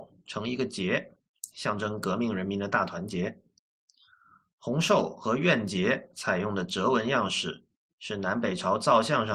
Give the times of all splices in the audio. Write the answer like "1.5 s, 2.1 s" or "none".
none